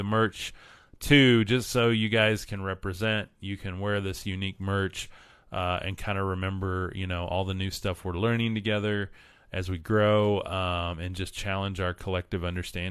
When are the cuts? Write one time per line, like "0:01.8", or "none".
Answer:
none